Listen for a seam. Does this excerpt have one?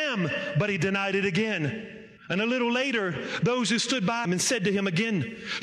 yes; 2 cuts; at 2.2 s, 4.2 s

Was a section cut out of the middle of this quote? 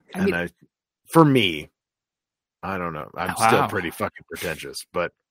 no; 0 cuts

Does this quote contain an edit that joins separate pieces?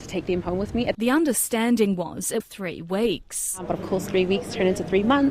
yes; 2 cuts; at 0.9 s, 2.4 s

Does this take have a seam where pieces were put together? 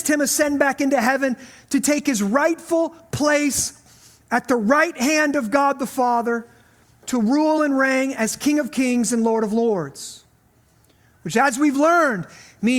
no; 0 cuts

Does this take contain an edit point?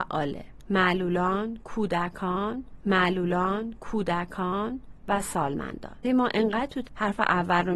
yes; 3 cuts; at 2.8 s, 6.0 s, 6.9 s

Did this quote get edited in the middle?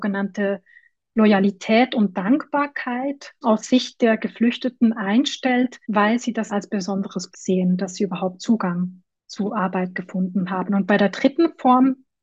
yes; 5 cuts; at 3.4 s, 5.8 s, 6.5 s, 7.3 s, 9.2 s

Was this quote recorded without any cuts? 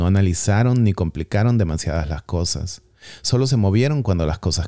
yes; 0 cuts

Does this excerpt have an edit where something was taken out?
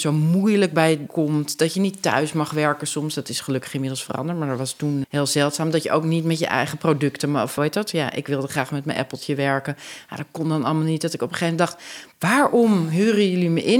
yes; 3 cuts; at 1.1 s, 5.0 s, 7.6 s

